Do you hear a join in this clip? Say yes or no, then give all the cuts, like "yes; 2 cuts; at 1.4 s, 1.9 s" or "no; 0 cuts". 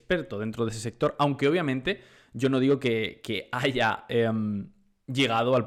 no; 0 cuts